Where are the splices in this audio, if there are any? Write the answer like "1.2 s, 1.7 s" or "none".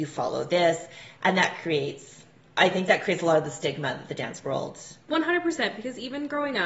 none